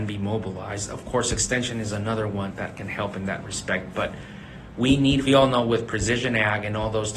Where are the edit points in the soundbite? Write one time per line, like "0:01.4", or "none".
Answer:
0:02.5
0:05.3